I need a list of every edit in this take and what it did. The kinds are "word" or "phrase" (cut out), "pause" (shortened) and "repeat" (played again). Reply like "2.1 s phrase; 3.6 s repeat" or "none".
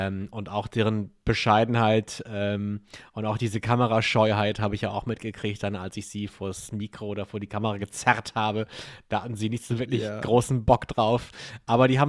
none